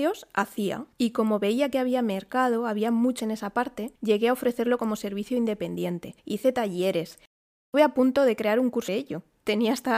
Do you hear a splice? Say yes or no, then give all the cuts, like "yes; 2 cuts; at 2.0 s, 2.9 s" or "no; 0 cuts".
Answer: yes; 6 cuts; at 0.9 s, 3.2 s, 4.0 s, 6.2 s, 7.7 s, 8.9 s